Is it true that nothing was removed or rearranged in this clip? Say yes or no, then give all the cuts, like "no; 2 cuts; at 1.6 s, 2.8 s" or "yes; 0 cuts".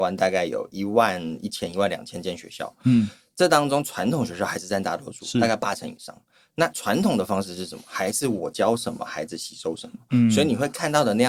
yes; 0 cuts